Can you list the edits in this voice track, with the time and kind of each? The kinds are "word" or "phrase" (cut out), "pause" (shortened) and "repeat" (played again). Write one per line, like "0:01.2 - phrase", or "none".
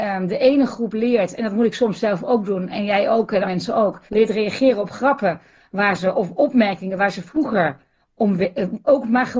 0:03.4 - word
0:04.1 - pause

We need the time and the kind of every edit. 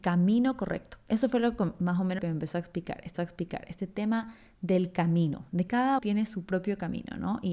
0:02.2 - word
0:03.2 - repeat
0:05.7 - word
0:06.0 - word

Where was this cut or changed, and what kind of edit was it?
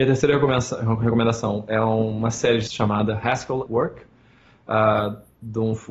0:02.7 - word
0:03.7 - word

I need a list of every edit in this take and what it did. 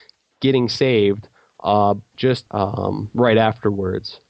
0:02.1 - word
0:02.5 - word

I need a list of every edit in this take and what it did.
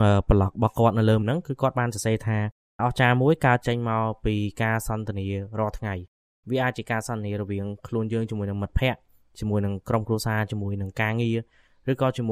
0:01.2 - word
0:02.8 - word

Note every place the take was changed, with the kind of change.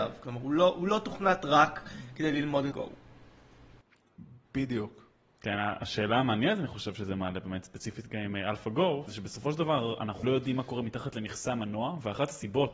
0:02.7 - word
0:09.1 - word
0:10.2 - word

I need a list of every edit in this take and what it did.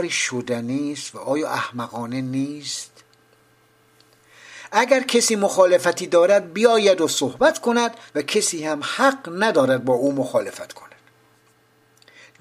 0:08.1 - pause

